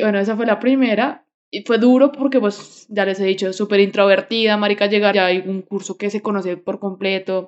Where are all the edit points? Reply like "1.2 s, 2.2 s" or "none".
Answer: 1.3 s, 5.1 s